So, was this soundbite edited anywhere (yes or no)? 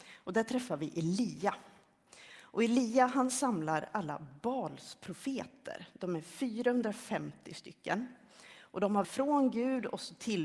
yes